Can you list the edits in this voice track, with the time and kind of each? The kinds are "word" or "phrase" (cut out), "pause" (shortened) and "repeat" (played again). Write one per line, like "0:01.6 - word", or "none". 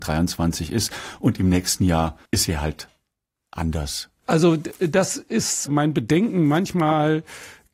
0:02.3 - pause

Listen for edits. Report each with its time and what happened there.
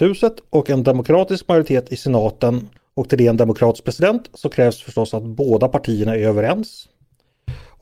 0:02.8 - pause

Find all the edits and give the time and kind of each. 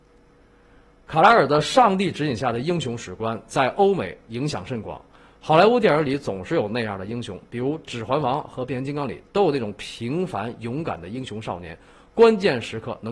none

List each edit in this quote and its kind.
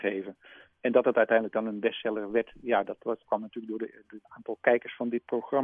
0:03.2 - word
0:04.2 - pause

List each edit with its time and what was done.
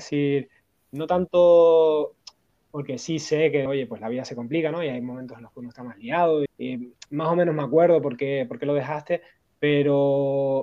0:03.7 - word
0:06.5 - word

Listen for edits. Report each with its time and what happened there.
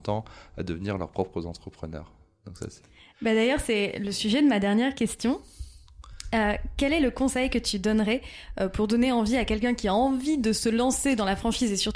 none

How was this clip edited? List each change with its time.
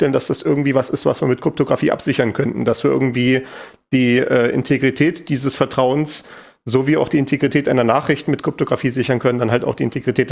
none

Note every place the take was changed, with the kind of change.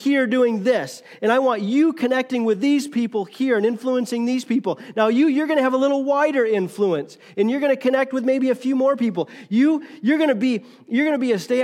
none

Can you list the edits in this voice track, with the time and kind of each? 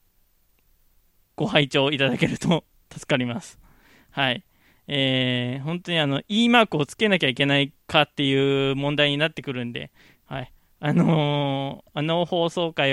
none

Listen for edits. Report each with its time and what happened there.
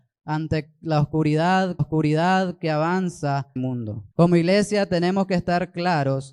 0:01.8 - repeat
0:03.6 - phrase
0:04.1 - pause

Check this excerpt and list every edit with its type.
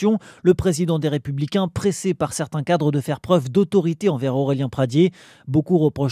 none

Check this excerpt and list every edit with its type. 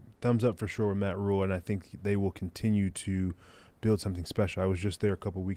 none

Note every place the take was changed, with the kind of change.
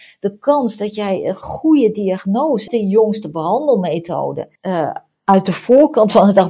0:02.7 - word
0:04.6 - pause

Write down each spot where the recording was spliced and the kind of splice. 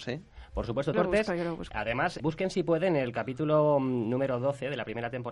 0:00.9 - word
0:02.2 - word

